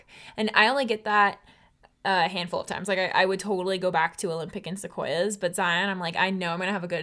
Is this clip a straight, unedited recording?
yes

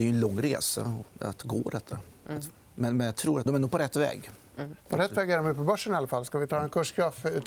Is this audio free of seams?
no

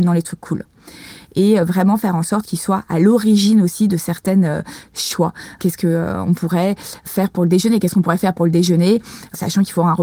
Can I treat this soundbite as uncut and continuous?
yes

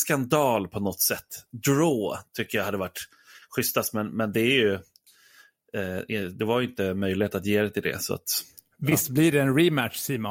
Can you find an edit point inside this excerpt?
no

